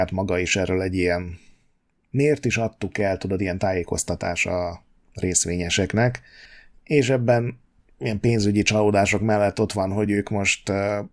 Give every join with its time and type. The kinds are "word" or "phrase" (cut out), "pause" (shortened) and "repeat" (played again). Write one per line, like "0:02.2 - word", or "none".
none